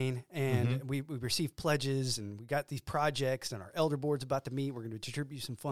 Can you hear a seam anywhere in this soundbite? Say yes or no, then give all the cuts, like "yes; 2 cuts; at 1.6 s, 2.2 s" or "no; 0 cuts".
no; 0 cuts